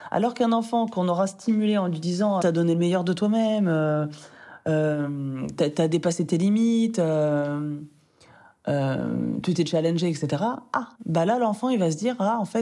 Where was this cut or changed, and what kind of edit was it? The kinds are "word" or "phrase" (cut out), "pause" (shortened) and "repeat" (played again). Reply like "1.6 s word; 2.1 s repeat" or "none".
2.4 s phrase; 10.9 s pause